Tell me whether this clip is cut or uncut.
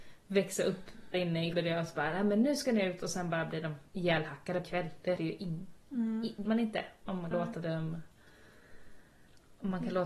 cut